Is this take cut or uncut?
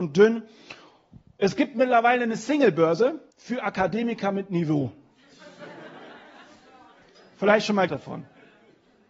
cut